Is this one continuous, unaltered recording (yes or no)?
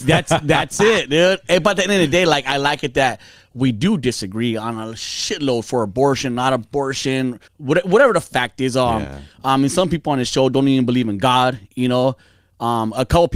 no